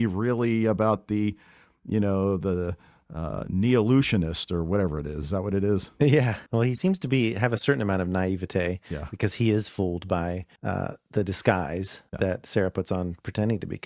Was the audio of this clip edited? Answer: yes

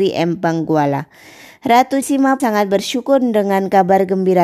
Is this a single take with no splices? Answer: no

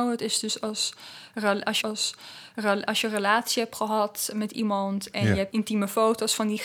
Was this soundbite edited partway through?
yes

